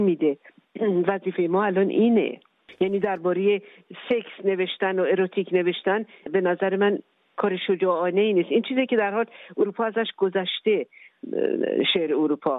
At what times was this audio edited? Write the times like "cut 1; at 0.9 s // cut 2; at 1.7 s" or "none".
none